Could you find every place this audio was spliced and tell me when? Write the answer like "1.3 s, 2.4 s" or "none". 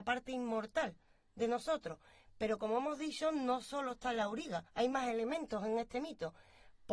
4.7 s